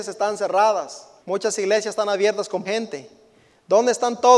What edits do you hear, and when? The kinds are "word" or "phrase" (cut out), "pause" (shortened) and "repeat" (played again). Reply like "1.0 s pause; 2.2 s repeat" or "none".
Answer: 1.2 s pause; 2.6 s word